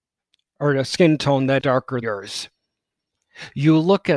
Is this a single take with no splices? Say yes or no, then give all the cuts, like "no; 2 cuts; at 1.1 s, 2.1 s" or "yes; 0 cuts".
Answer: no; 2 cuts; at 1.6 s, 2.0 s